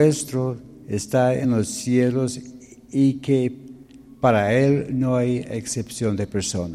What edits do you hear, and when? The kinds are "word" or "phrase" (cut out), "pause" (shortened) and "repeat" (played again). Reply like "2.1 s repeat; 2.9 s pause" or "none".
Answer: none